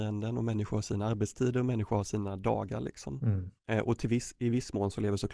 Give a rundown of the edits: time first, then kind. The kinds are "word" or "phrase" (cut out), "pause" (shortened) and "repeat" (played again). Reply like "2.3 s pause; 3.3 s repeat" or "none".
3.6 s pause